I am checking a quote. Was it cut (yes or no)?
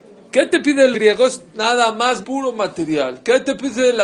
yes